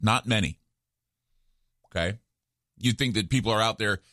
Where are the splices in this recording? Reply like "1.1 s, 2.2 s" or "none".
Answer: 2.8 s